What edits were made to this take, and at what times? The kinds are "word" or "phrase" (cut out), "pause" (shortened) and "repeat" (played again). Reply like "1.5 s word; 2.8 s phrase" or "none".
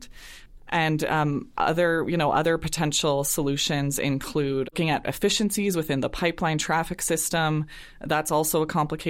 4.6 s word